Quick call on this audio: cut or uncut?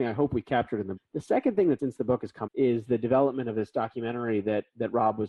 cut